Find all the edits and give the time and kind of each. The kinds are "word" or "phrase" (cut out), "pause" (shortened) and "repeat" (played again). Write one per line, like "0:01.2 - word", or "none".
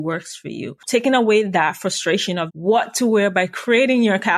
0:02.5 - word